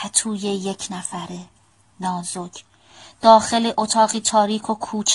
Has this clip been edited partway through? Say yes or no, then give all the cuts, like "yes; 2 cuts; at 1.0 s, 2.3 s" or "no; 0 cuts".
no; 0 cuts